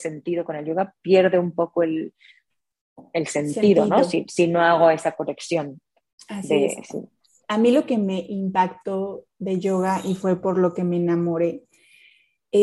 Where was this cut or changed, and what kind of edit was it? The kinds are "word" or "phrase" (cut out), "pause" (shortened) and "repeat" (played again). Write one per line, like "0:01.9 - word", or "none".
none